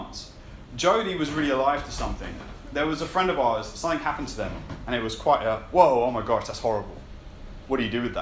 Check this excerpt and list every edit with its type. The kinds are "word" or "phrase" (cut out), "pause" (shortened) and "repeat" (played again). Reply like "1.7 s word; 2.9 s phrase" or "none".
none